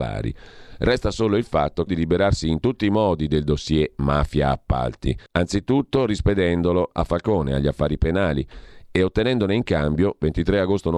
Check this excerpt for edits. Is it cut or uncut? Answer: cut